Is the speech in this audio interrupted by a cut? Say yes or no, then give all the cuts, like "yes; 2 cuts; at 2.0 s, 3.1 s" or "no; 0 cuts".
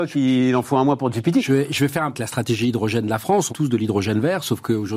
yes; 2 cuts; at 2.1 s, 3.5 s